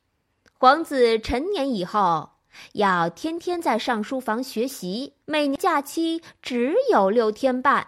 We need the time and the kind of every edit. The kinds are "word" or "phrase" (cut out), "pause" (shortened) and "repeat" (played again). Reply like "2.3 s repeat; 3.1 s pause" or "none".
5.2 s pause